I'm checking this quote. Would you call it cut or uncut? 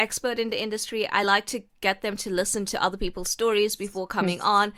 uncut